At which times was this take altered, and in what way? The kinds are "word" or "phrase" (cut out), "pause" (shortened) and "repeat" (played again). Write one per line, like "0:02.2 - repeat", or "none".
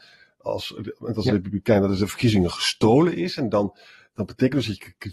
none